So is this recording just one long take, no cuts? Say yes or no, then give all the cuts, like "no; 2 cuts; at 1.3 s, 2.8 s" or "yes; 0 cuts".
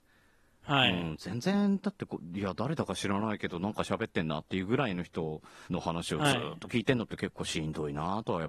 no; 1 cut; at 5.7 s